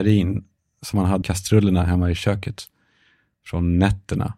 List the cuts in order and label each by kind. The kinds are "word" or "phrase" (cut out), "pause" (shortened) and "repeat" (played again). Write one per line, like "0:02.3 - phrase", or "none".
0:01.2 - word